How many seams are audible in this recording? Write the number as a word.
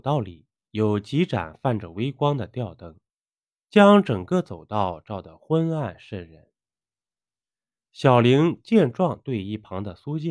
zero